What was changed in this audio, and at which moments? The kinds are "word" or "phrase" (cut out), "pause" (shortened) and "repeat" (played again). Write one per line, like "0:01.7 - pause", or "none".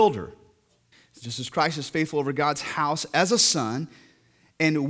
0:00.9 - pause

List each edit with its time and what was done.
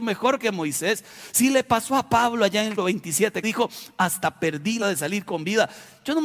0:02.8 - word
0:03.4 - word
0:04.8 - word

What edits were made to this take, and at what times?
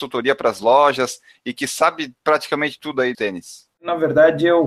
0:03.1 - word
0:03.7 - pause

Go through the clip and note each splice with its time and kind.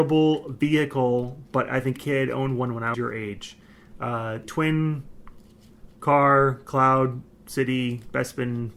0:02.0 - word
0:02.9 - word
0:04.4 - phrase

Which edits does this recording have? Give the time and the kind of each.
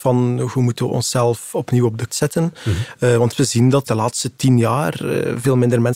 0:02.1 - word
0:03.3 - word
0:03.9 - word

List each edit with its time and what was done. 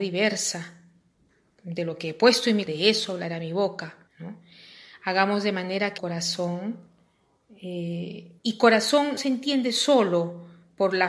0:02.7 - word
0:04.1 - pause
0:06.0 - word
0:08.4 - pause
0:09.2 - word

